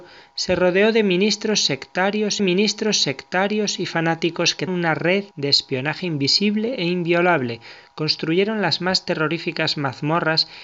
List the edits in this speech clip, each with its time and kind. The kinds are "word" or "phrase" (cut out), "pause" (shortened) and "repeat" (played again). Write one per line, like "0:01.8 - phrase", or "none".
0:02.4 - repeat
0:04.7 - word
0:05.3 - pause